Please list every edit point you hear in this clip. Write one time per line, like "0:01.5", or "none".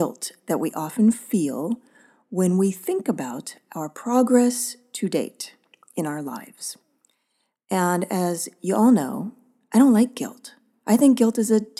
none